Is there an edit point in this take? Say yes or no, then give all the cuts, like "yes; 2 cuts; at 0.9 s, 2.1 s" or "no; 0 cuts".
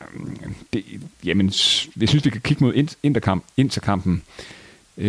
no; 0 cuts